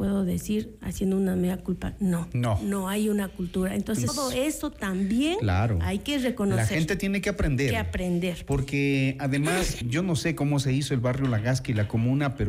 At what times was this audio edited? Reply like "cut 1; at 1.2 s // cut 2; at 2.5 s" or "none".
cut 1; at 4.1 s // cut 2; at 9.8 s